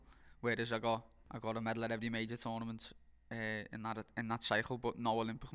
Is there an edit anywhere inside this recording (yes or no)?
no